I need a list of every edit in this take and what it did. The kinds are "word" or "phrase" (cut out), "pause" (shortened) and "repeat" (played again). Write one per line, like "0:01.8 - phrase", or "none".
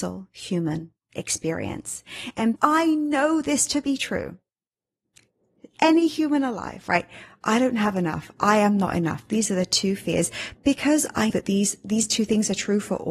0:02.6 - word
0:11.3 - word